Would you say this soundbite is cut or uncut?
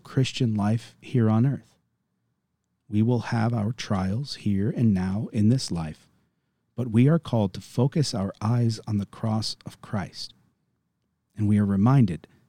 uncut